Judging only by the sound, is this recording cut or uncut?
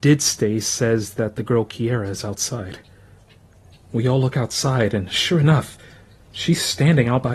uncut